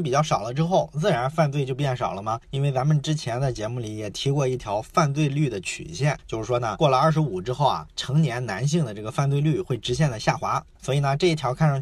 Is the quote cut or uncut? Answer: uncut